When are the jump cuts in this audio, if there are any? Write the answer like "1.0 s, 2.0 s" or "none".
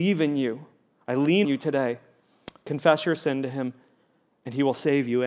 1.4 s